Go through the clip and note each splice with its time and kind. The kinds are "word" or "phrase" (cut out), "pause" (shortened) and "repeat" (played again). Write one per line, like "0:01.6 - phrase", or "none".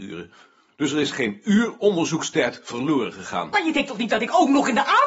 none